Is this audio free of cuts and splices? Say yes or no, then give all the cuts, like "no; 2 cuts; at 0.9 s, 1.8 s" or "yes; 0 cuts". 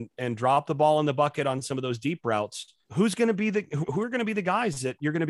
no; 2 cuts; at 2.8 s, 3.8 s